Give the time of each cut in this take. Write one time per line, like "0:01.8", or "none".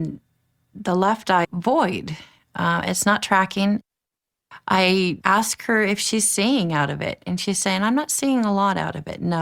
0:01.4